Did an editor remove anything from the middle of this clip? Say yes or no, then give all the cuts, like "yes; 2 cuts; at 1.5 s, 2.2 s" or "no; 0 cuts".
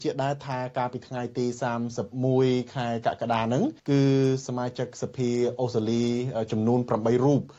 yes; 1 cut; at 3.8 s